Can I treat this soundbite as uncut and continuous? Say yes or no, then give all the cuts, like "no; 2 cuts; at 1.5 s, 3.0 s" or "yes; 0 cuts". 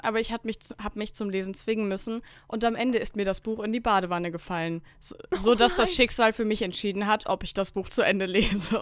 yes; 0 cuts